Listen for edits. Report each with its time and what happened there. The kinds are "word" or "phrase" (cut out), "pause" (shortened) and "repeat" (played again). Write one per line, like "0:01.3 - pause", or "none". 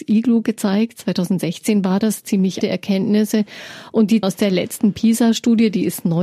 0:02.6 - word
0:04.2 - word